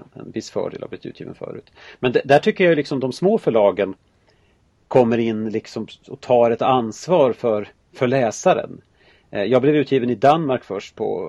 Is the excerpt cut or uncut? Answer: uncut